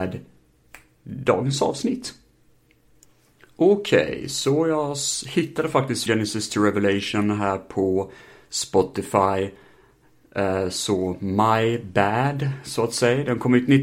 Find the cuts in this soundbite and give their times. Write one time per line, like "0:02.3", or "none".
0:06.1